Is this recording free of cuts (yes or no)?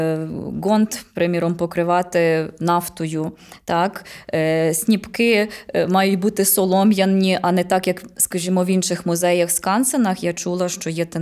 yes